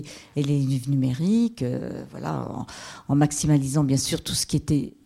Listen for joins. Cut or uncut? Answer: uncut